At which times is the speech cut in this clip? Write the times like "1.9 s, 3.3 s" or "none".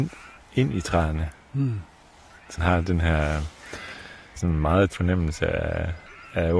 2.6 s, 4.4 s, 4.9 s